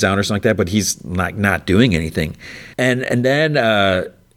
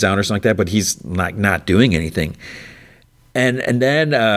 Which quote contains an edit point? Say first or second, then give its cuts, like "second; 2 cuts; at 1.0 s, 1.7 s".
first; 1 cut; at 2.7 s